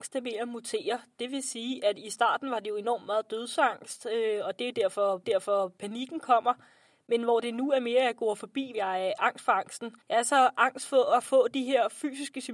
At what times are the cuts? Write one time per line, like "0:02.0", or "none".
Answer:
0:05.2
0:08.7
0:10.0